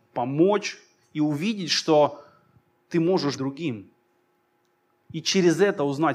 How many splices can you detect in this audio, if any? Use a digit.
1